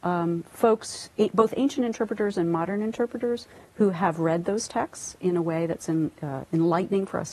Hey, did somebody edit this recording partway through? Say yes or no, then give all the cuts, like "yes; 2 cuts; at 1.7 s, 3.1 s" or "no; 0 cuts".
no; 0 cuts